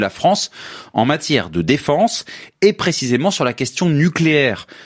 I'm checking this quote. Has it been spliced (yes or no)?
no